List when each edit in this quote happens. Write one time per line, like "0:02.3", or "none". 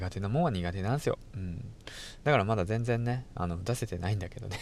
none